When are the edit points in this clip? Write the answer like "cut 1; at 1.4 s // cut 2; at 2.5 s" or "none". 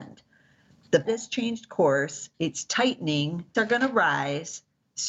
cut 1; at 1.1 s // cut 2; at 3.5 s